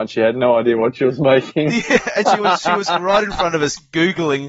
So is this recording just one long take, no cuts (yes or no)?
yes